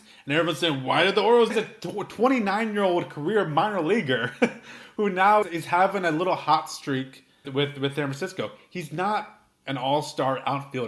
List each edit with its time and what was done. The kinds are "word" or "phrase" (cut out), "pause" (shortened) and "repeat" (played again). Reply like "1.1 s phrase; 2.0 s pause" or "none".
1.5 s phrase; 5.4 s word; 7.4 s word